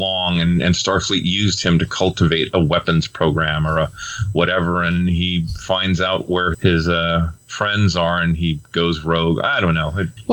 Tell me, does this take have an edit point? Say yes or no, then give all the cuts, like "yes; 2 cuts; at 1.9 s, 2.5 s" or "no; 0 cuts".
yes; 2 cuts; at 6.5 s, 7.4 s